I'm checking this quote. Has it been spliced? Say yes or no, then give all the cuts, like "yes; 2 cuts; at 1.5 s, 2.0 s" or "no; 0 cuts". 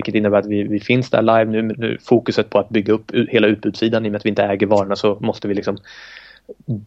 yes; 1 cut; at 1.7 s